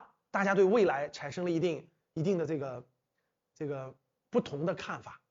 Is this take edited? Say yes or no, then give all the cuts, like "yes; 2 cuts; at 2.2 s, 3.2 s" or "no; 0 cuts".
no; 0 cuts